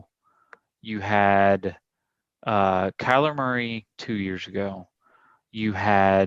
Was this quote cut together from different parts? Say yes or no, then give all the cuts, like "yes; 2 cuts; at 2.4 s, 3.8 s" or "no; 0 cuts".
no; 0 cuts